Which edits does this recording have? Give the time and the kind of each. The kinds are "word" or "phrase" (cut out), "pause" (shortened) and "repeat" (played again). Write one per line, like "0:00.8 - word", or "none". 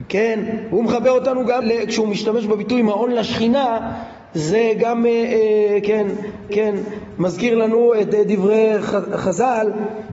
0:01.6 - word
0:06.5 - repeat